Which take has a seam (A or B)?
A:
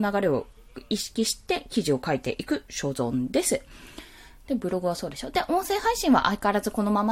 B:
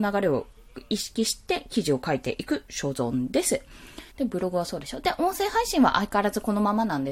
B